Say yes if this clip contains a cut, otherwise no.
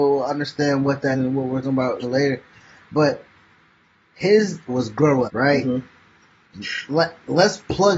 yes